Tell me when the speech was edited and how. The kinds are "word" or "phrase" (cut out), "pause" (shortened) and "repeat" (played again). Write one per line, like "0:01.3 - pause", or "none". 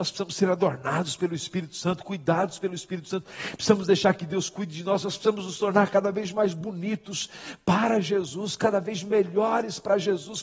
none